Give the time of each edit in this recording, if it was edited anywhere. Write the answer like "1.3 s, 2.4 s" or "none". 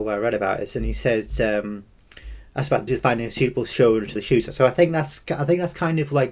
2.9 s, 4.2 s